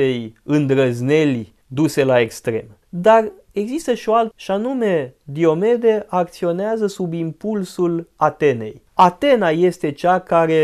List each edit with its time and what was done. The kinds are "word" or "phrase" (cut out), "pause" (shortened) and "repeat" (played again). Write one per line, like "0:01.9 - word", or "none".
0:01.6 - pause
0:02.8 - pause
0:04.3 - word
0:08.9 - pause